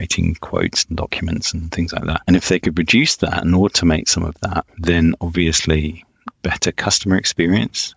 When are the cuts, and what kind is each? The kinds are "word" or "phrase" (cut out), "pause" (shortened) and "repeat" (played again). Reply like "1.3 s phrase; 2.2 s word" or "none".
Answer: 4.7 s pause; 6.3 s pause